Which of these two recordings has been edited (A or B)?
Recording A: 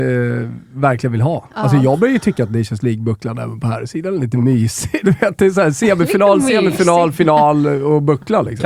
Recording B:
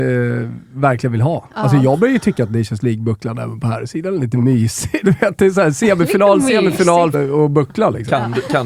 B